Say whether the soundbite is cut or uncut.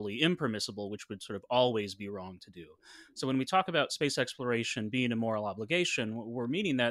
uncut